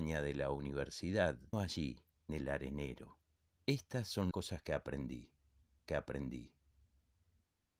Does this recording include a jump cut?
yes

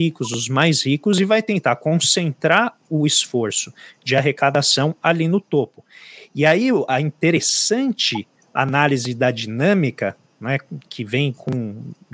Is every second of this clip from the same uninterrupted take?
yes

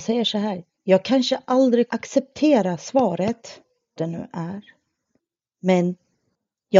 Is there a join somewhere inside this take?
yes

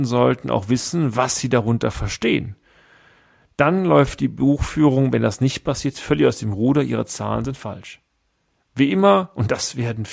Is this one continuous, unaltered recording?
yes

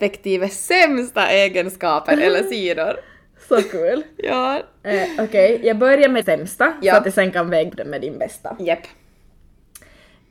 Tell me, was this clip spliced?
yes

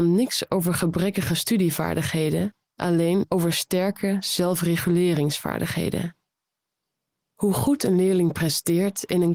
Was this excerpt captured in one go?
yes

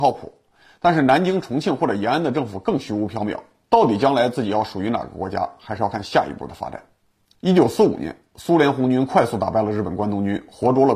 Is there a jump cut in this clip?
no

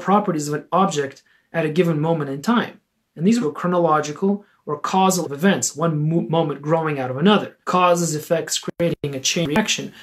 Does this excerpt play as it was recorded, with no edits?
no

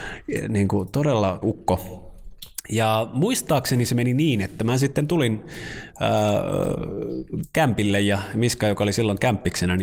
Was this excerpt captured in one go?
no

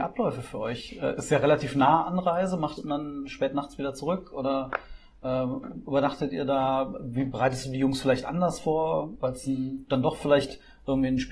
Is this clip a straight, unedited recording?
no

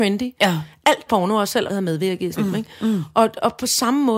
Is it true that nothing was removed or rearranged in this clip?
no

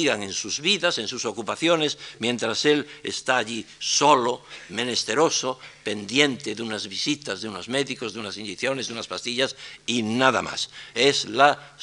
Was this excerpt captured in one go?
no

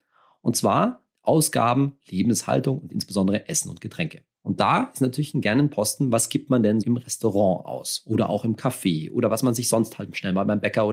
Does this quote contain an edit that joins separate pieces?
yes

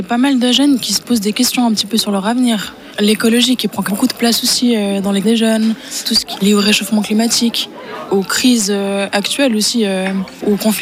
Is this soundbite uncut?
no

